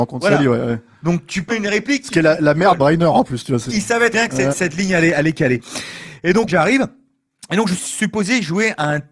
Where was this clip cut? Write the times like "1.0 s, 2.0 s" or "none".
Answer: 1.5 s, 2.8 s, 3.7 s, 4.1 s, 4.5 s, 6.5 s, 7.8 s